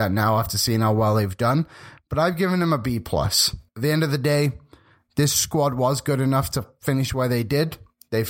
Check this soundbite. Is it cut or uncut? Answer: cut